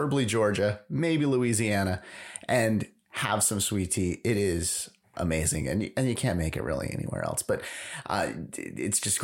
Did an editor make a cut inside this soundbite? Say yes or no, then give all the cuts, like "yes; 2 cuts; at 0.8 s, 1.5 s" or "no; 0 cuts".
no; 0 cuts